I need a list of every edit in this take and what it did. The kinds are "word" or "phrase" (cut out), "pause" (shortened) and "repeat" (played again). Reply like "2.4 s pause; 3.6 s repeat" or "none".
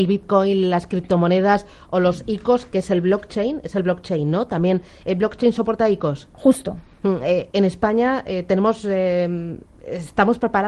7.5 s word